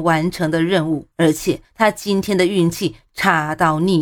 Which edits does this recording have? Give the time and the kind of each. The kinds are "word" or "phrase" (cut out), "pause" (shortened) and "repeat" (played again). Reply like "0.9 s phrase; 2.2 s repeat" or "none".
1.1 s pause; 1.6 s pause